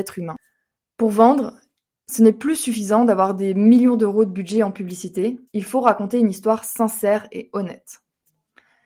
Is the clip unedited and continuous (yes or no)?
no